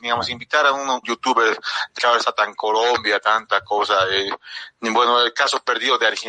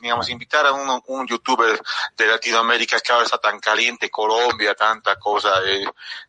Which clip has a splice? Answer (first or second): first